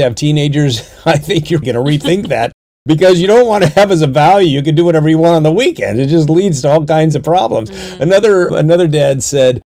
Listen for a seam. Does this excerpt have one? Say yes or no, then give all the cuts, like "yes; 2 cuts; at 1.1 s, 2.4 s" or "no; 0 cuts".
yes; 2 cuts; at 1.6 s, 8.5 s